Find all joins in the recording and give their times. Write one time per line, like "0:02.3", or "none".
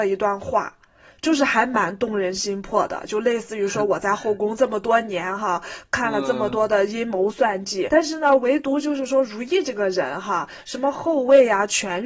0:07.9

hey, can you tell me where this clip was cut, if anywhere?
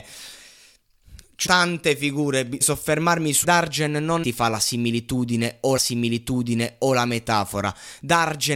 0:01.5
0:02.6
0:03.4
0:04.2
0:05.8

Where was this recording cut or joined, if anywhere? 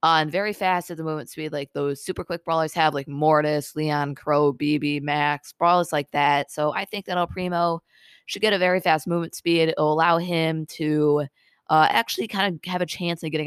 none

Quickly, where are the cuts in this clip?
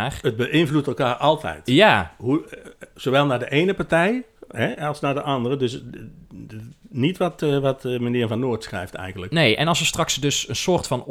none

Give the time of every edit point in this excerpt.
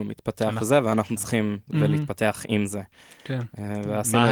0:01.7

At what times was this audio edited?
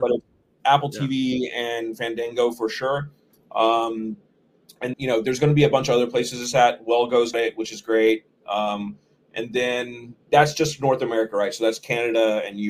0:04.9
0:07.3
0:10.2

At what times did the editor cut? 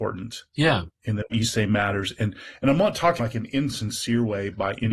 0:01.3
0:03.2

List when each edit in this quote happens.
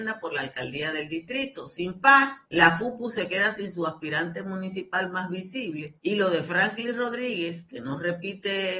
0:02.5
0:06.0

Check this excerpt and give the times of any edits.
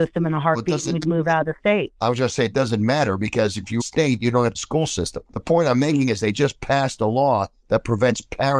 0:01.9
0:03.8
0:04.5
0:05.3

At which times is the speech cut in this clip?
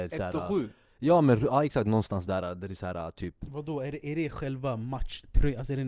none

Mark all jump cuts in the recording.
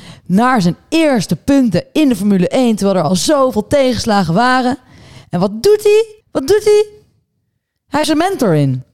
0:06.2
0:08.0

